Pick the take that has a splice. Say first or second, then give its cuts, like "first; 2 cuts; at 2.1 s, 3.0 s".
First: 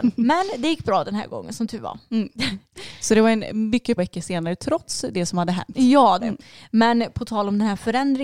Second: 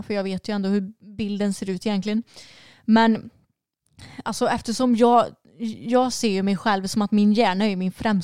first; 2 cuts; at 4.0 s, 6.2 s